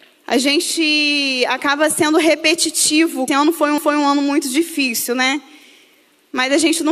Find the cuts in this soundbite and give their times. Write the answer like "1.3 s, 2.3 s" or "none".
3.3 s, 3.8 s